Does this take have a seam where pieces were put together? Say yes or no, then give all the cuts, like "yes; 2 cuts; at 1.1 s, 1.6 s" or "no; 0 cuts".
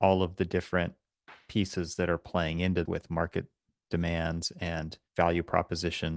yes; 2 cuts; at 2.8 s, 5.1 s